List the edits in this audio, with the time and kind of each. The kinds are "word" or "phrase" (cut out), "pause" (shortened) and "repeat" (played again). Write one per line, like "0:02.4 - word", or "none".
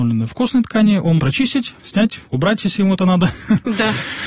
0:01.2 - phrase
0:01.8 - word
0:02.3 - word